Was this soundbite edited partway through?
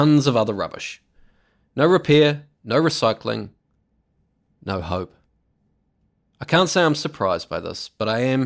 no; 0 cuts

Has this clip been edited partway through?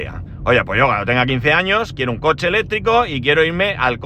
no; 0 cuts

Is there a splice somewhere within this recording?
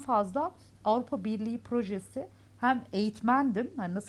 no; 0 cuts

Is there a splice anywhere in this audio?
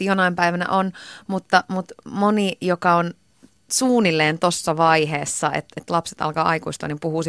no; 0 cuts

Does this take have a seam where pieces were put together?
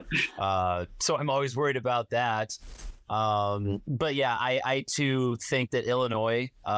no; 0 cuts

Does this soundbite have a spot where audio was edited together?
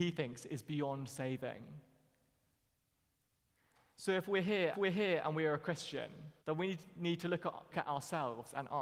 yes; 3 cuts; at 4.7 s, 6.4 s, 7.7 s

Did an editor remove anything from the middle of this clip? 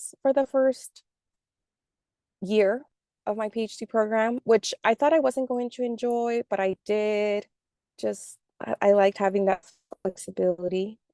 no; 0 cuts

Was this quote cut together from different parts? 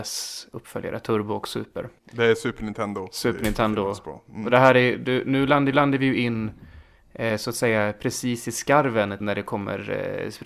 yes; 3 cuts; at 2.0 s, 5.7 s, 9.2 s

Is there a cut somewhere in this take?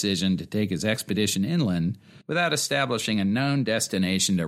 yes; 1 cut; at 2.2 s

